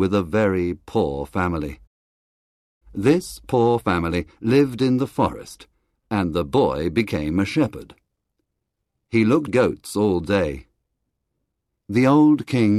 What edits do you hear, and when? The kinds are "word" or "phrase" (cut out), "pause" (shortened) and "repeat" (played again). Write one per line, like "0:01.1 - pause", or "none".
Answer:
0:09.5 - word